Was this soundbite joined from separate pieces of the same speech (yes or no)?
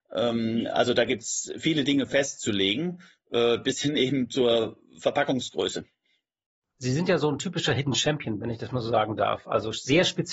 no